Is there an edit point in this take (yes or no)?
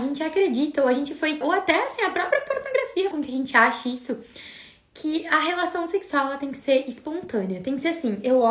yes